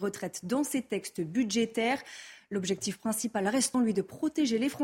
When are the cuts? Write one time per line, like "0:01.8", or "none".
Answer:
0:03.7